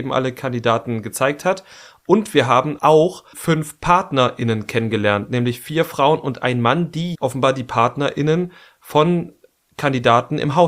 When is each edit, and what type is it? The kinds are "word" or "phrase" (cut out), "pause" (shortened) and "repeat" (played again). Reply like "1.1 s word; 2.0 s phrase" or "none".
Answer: 2.8 s word; 3.3 s word; 7.1 s word